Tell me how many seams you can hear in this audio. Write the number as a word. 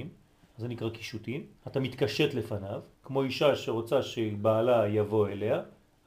two